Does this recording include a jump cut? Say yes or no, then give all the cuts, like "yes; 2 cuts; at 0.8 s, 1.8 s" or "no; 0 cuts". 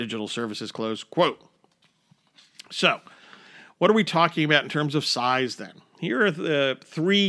no; 0 cuts